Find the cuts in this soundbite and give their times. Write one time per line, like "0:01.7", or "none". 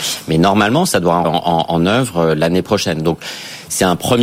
0:01.2